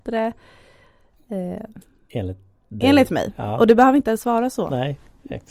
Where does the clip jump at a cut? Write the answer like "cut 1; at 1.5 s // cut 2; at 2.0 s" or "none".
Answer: none